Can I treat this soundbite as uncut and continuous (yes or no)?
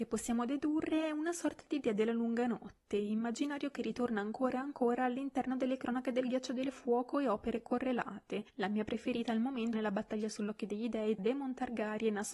no